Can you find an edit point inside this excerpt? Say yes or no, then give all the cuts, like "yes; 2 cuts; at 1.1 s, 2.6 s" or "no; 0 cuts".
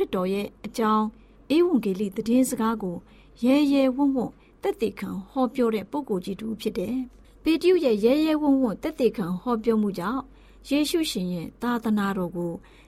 no; 0 cuts